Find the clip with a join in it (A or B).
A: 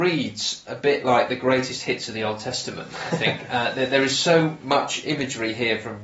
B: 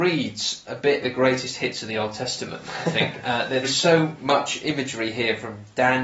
B